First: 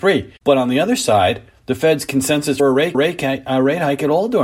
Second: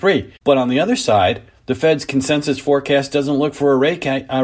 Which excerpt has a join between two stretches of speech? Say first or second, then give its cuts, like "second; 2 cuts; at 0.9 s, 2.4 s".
first; 2 cuts; at 2.6 s, 2.9 s